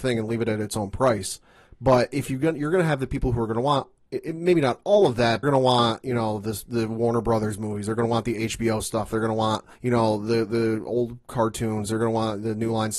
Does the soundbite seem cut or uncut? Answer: cut